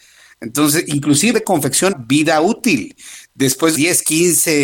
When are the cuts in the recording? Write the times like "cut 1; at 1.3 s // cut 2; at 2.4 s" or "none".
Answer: cut 1; at 1.3 s // cut 2; at 1.9 s // cut 3; at 3.7 s